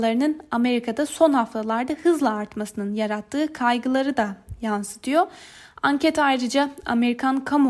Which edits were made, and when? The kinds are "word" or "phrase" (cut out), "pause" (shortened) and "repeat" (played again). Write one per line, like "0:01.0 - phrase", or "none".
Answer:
none